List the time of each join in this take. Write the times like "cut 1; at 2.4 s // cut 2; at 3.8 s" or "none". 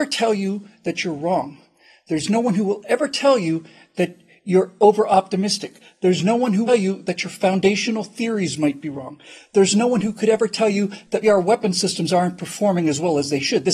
cut 1; at 6.7 s // cut 2; at 11.2 s